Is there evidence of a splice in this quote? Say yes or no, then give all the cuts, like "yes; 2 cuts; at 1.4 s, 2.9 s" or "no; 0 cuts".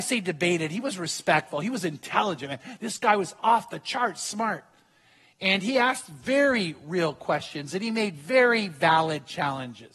no; 0 cuts